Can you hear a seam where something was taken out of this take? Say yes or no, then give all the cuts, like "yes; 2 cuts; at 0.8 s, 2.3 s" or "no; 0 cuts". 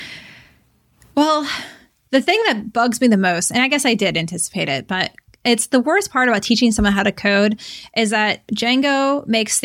no; 0 cuts